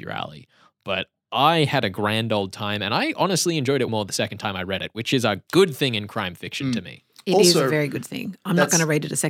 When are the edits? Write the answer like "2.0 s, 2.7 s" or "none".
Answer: 3.9 s